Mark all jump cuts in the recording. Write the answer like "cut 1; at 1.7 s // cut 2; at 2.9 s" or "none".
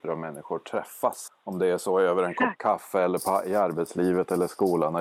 none